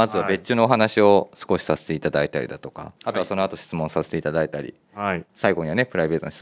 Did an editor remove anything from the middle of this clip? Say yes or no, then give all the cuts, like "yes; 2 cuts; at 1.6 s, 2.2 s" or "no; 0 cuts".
yes; 2 cuts; at 3.0 s, 5.3 s